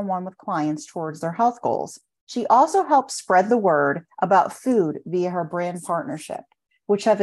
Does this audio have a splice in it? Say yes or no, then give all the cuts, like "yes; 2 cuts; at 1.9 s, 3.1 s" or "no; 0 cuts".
no; 0 cuts